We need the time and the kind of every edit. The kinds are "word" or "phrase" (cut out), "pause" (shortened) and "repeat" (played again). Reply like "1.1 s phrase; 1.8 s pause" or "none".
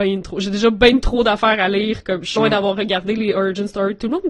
2.4 s word